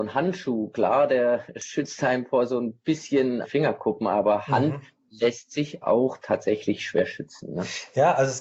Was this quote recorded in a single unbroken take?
no; 2 cuts; at 3.4 s, 5.8 s

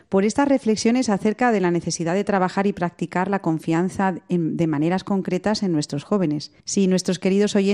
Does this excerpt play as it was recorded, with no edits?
no; 1 cut; at 6.6 s

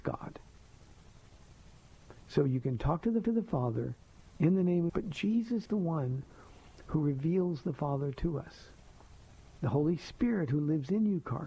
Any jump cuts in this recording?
yes; 3 cuts; at 3.2 s, 4.9 s, 5.7 s

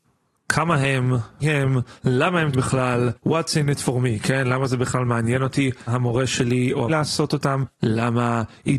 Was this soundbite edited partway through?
yes; 7 cuts; at 1.4 s, 2.0 s, 2.5 s, 3.2 s, 5.9 s, 6.9 s, 7.7 s

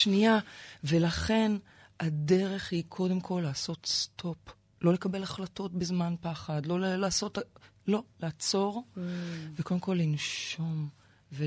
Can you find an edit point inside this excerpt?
no; 0 cuts

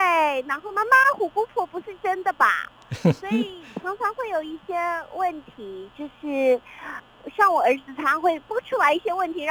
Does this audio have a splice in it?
yes; 1 cut; at 8.4 s

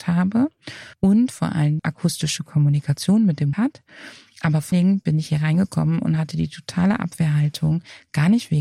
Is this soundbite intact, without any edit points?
no; 4 cuts; at 0.9 s, 1.8 s, 3.5 s, 4.7 s

